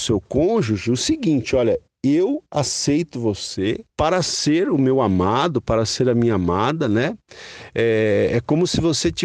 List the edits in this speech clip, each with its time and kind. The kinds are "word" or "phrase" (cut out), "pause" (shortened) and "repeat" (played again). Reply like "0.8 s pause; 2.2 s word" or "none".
3.9 s pause